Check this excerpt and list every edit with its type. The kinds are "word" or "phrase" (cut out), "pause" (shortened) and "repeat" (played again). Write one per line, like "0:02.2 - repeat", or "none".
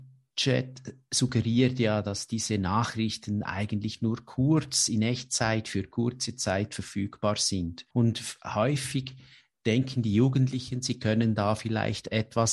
0:07.9 - pause